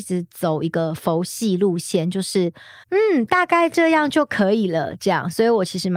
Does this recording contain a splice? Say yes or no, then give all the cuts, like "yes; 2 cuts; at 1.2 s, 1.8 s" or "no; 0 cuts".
yes; 1 cut; at 2.8 s